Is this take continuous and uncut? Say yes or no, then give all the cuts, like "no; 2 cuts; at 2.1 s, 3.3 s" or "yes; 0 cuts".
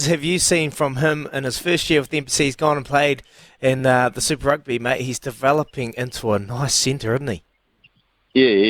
yes; 0 cuts